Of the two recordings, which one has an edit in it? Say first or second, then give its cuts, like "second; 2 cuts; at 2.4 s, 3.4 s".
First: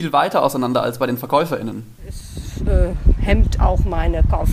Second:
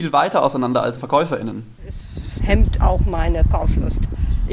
second; 2 cuts; at 1.0 s, 2.4 s